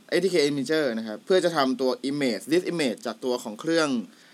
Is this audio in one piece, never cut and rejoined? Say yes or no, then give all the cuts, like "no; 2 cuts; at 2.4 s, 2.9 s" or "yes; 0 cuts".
no; 1 cut; at 1.2 s